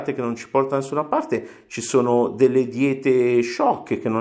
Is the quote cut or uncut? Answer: uncut